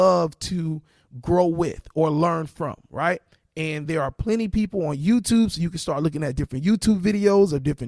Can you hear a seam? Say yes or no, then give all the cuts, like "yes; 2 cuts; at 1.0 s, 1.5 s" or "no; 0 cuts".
no; 0 cuts